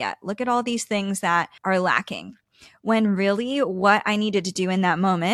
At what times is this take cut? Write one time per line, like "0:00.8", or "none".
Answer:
0:01.6

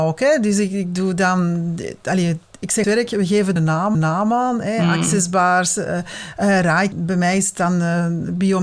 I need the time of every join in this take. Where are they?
0:02.8
0:03.6
0:03.9
0:06.9

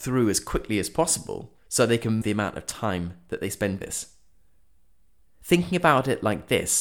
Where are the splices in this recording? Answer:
0:01.6
0:02.2
0:03.8

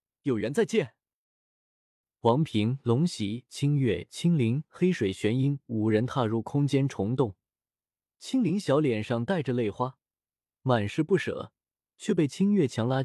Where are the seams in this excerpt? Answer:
none

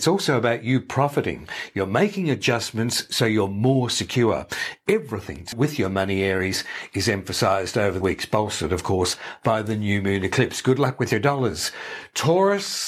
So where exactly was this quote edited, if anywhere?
0:05.5
0:08.0

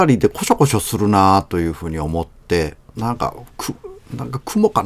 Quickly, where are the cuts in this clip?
0:02.9

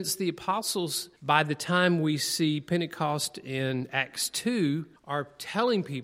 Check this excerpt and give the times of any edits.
0:01.2
0:05.0

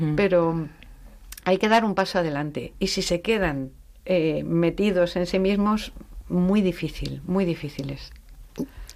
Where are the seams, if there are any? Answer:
none

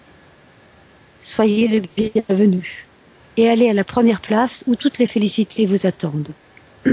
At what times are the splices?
none

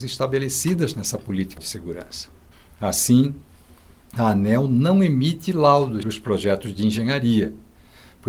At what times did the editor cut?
0:01.6
0:02.5
0:06.0

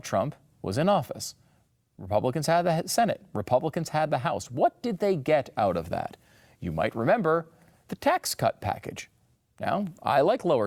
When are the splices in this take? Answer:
none

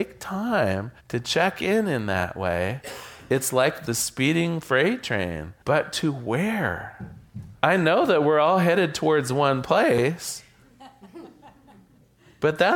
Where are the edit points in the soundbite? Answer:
0:01.0
0:05.6
0:07.6

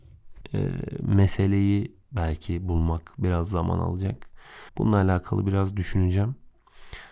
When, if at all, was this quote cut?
0:04.7

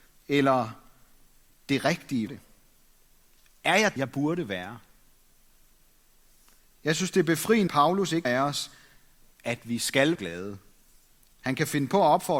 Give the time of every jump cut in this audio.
0:02.3
0:04.0
0:07.7
0:08.2
0:10.1

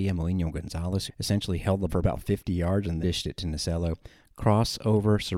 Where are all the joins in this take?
0:01.1
0:01.9
0:03.0

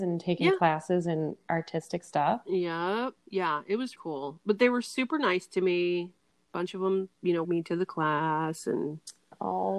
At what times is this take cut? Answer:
0:03.2
0:04.0
0:07.1
0:07.4

